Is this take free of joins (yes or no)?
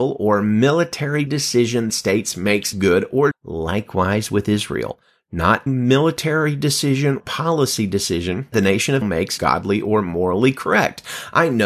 no